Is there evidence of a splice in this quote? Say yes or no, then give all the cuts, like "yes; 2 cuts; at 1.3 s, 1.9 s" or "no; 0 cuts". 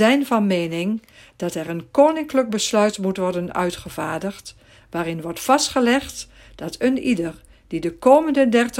no; 0 cuts